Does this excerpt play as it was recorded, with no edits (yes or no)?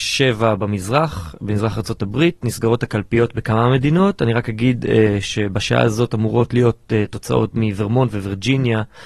yes